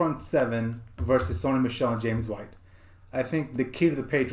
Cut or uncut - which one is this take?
uncut